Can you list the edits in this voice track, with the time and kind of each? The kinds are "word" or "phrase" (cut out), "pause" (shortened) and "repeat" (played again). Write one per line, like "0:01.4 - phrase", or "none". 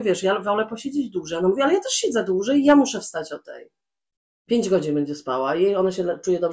none